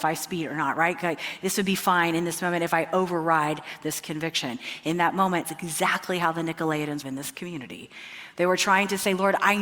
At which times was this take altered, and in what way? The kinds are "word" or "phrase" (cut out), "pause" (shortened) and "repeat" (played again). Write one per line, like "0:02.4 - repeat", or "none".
0:05.4 - word
0:07.0 - phrase